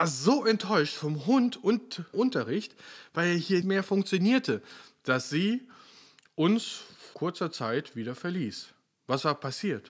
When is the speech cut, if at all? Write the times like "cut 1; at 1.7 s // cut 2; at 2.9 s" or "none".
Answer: cut 1; at 2.1 s // cut 2; at 3.6 s // cut 3; at 7.1 s